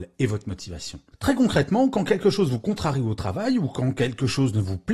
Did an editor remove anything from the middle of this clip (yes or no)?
no